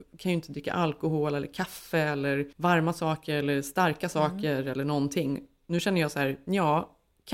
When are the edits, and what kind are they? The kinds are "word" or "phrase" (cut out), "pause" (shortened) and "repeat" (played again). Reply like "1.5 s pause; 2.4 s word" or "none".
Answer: 2.5 s pause